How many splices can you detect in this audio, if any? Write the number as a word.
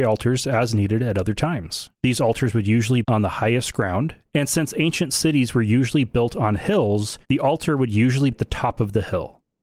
four